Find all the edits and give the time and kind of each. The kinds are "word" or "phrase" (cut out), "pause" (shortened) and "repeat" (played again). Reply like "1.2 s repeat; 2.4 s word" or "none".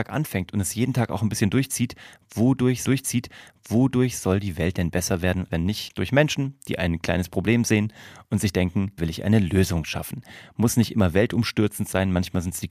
2.8 s repeat; 5.5 s word; 5.9 s word; 9.0 s word